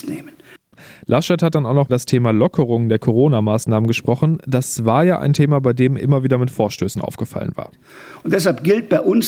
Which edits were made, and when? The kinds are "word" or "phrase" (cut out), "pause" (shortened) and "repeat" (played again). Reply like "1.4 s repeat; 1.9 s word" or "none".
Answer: 1.9 s phrase; 6.0 s word